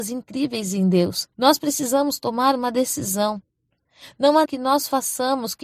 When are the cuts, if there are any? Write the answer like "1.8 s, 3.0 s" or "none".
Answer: 1.3 s, 4.4 s